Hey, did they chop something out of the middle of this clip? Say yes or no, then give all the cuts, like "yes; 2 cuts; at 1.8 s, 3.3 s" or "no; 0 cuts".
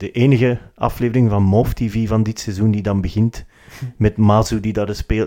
no; 0 cuts